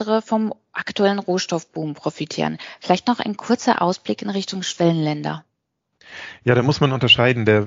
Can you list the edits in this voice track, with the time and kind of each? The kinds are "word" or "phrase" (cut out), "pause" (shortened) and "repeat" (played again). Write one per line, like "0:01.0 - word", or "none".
none